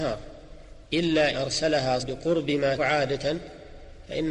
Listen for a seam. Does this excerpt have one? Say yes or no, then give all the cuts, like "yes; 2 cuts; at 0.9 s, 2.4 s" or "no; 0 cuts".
yes; 3 cuts; at 1.3 s, 2.0 s, 2.8 s